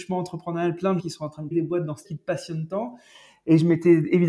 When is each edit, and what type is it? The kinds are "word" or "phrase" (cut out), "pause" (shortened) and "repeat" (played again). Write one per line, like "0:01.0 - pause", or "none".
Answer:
0:01.0 - word
0:01.5 - word
0:02.0 - word